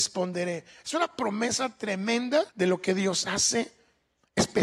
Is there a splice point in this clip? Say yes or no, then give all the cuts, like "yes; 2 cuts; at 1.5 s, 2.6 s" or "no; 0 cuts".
yes; 1 cut; at 2.5 s